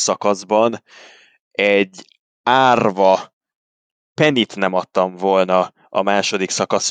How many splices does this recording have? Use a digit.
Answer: 0